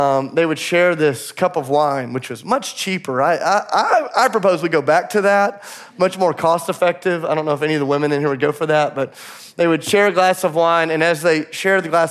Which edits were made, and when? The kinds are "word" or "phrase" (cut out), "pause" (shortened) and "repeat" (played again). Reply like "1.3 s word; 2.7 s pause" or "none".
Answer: none